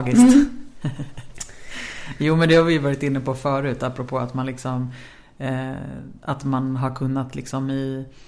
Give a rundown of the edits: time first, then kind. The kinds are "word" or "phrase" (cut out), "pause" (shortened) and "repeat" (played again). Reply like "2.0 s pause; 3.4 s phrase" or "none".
none